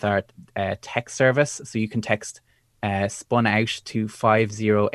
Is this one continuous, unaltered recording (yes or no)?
yes